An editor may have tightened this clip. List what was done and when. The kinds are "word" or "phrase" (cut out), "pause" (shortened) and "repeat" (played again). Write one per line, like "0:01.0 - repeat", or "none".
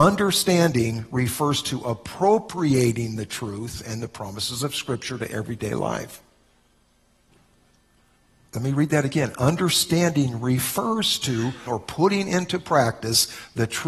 0:11.7 - word